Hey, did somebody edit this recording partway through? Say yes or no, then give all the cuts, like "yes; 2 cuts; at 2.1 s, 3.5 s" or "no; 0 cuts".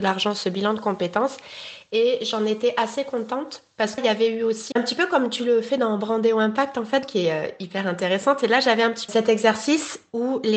yes; 4 cuts; at 4.0 s, 4.7 s, 7.0 s, 9.1 s